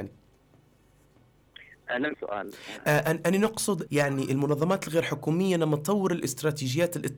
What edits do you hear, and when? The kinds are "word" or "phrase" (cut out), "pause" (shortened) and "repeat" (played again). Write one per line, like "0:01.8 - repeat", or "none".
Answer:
0:02.1 - word
0:03.9 - phrase